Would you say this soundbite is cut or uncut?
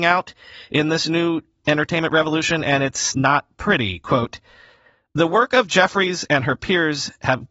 uncut